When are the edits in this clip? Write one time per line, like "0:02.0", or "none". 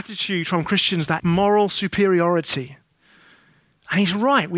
0:01.2